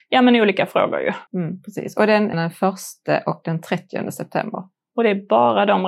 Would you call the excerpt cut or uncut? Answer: cut